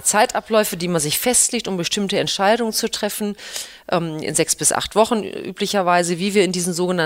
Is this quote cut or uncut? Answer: uncut